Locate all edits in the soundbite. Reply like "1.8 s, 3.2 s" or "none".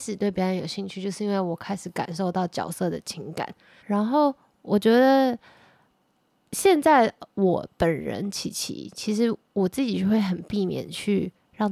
3.8 s